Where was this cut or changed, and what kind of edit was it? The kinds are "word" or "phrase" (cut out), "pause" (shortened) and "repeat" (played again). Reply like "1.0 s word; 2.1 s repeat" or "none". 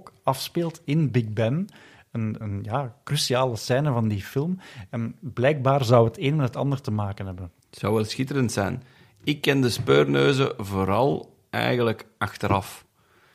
2.4 s word; 7.6 s pause